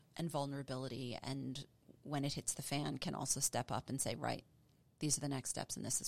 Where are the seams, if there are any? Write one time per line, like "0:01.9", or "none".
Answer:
none